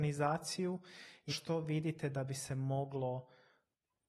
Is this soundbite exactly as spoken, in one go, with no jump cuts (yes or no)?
no